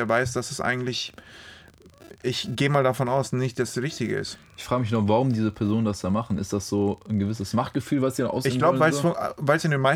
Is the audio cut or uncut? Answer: uncut